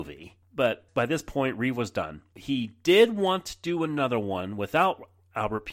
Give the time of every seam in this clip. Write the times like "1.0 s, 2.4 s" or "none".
none